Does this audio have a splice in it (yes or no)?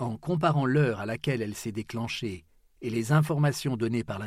no